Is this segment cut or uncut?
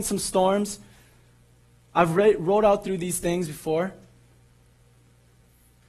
uncut